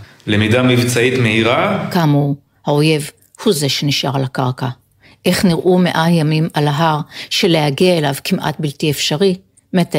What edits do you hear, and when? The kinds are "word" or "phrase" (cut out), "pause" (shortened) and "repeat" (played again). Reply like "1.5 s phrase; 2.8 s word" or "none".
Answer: none